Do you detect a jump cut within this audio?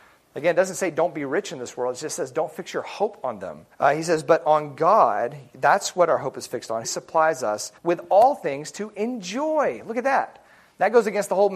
yes; 3 cuts; at 3.7 s, 6.8 s, 7.8 s

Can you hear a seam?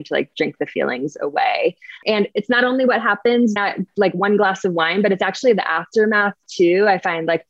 yes; 1 cut; at 3.6 s

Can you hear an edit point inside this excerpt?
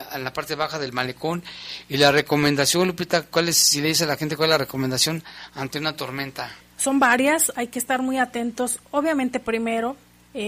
yes; 1 cut; at 6.6 s

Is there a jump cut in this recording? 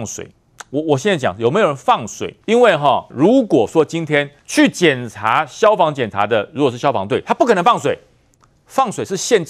yes; 3 cuts; at 2.4 s, 3.1 s, 4.4 s

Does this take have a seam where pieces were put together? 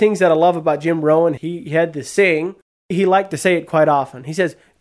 no; 0 cuts

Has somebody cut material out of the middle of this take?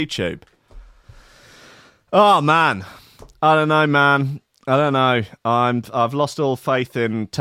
no; 0 cuts

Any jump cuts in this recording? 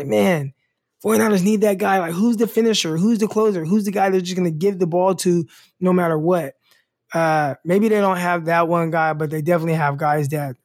no; 0 cuts

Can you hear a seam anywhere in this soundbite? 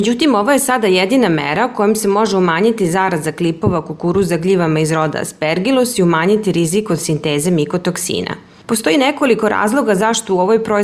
no; 0 cuts

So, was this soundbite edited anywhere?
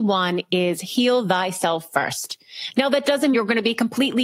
yes; 1 cut; at 3.3 s

